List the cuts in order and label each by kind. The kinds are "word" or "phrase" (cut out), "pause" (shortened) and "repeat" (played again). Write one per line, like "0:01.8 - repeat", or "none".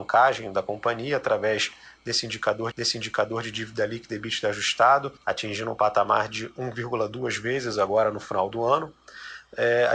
0:02.7 - repeat
0:05.2 - pause